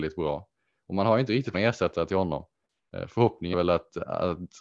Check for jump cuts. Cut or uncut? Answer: cut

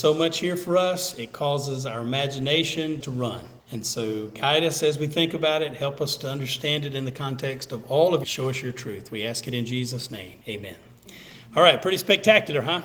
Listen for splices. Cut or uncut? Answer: cut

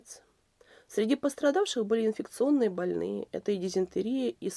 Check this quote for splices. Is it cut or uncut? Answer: uncut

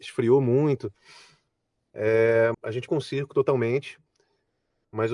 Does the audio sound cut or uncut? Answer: cut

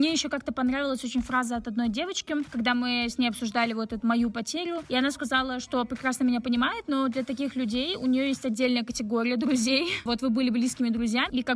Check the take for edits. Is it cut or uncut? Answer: uncut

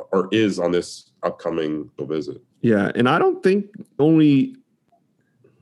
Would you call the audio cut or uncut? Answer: cut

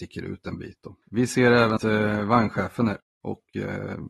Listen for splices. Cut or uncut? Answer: cut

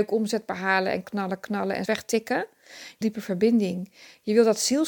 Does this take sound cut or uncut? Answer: cut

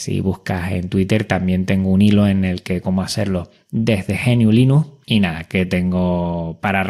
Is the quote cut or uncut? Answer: cut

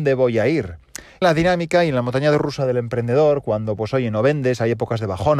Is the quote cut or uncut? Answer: cut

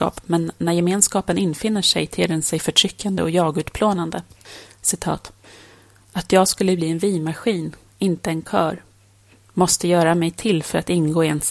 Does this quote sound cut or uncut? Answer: uncut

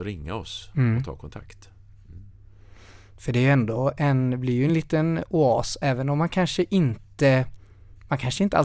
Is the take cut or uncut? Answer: uncut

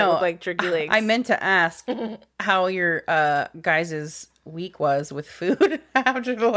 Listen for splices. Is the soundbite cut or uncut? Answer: uncut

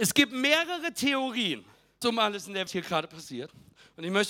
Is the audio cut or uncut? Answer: cut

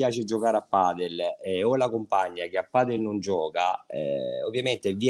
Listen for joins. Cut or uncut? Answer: uncut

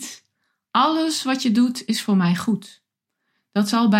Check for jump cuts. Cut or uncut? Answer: uncut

